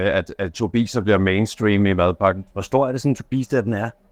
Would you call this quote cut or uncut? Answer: cut